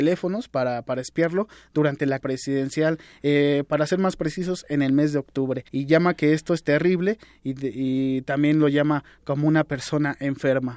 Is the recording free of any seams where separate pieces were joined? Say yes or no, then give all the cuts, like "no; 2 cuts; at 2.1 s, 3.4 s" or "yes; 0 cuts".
no; 2 cuts; at 2.2 s, 5.7 s